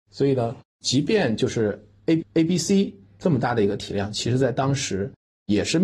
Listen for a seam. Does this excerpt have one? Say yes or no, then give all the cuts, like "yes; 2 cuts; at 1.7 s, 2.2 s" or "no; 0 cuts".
yes; 1 cut; at 2.2 s